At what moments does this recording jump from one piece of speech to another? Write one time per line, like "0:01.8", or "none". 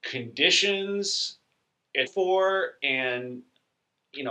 0:02.1